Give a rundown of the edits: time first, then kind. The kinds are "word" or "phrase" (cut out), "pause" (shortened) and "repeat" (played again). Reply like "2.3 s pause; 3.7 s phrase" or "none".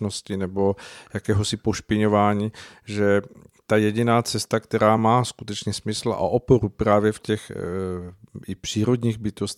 none